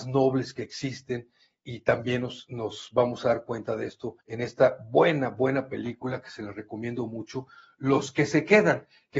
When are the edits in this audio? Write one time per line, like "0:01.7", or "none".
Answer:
0:04.2